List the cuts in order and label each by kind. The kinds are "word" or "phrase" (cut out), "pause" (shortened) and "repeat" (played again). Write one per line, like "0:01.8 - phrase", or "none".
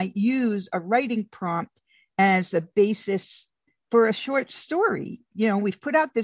none